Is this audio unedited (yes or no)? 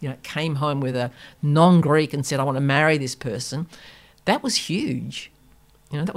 yes